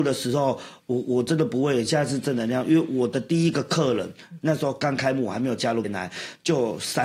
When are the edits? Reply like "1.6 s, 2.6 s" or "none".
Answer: 5.8 s